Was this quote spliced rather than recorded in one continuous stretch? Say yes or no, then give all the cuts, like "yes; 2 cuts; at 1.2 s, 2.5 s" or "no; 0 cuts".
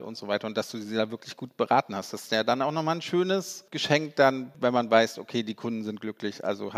no; 0 cuts